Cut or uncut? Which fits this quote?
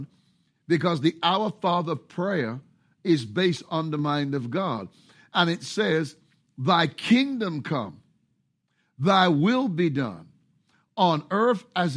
uncut